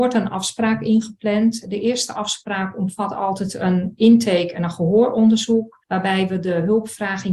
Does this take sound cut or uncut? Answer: cut